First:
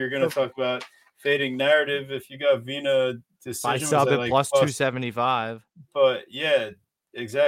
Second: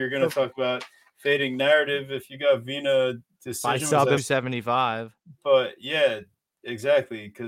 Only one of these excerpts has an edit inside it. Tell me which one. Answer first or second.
second